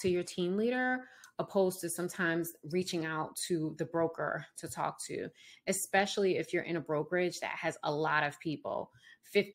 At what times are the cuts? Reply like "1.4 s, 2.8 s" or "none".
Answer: none